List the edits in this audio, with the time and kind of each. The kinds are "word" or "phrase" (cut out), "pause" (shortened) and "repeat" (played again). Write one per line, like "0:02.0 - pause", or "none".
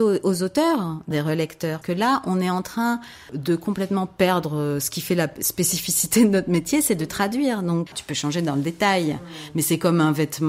0:01.1 - phrase
0:01.8 - word
0:07.9 - word